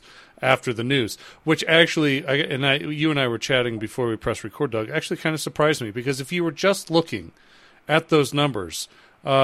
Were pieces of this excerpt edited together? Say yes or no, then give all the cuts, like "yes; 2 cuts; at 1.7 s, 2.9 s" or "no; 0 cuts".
no; 0 cuts